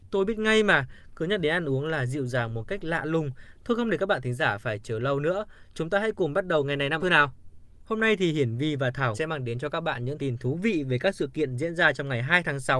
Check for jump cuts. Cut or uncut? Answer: cut